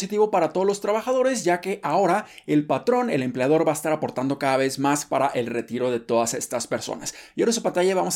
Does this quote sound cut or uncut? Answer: uncut